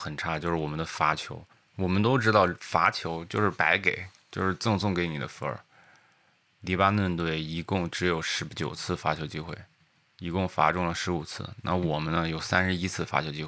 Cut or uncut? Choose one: uncut